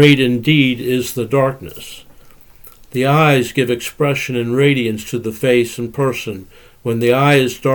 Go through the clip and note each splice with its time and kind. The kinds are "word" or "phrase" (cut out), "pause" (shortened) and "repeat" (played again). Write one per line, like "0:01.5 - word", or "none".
none